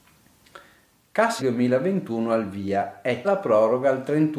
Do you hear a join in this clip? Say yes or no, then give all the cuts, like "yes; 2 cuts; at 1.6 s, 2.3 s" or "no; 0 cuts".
yes; 2 cuts; at 1.4 s, 3.2 s